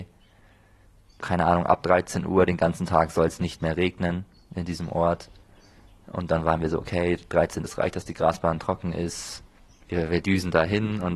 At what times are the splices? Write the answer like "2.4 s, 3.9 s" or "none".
1.2 s, 7.6 s